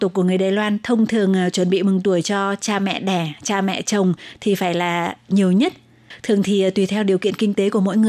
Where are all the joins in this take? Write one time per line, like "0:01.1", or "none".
none